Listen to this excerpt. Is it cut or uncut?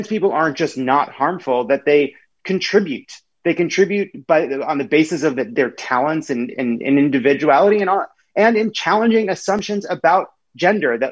uncut